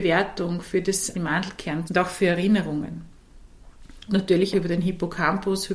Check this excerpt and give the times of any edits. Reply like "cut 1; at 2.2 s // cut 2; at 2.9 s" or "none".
cut 1; at 1.1 s // cut 2; at 1.9 s // cut 3; at 4.1 s // cut 4; at 4.5 s